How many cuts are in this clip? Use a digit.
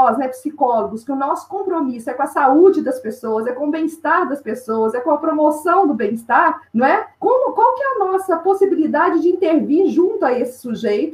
2